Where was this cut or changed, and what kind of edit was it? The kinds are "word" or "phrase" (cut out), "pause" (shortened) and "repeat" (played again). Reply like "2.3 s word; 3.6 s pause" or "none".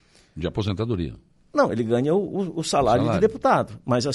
none